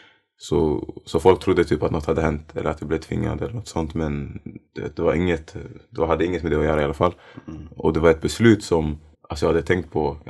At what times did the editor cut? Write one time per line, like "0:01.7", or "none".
0:04.7
0:09.1